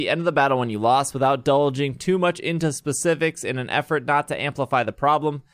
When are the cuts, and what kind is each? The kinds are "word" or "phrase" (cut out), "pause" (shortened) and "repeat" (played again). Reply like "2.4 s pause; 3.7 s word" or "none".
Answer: none